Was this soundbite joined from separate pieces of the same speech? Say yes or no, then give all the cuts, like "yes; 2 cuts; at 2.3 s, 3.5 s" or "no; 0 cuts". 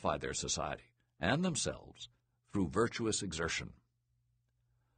no; 0 cuts